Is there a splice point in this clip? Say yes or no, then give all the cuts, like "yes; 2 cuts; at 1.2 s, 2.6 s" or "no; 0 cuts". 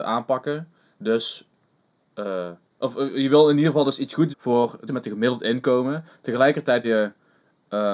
yes; 3 cuts; at 4.3 s, 4.9 s, 6.8 s